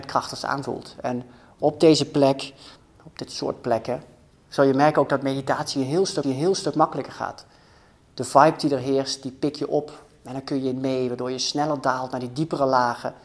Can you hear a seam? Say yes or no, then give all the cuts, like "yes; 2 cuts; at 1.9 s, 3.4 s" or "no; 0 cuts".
yes; 2 cuts; at 2.8 s, 6.2 s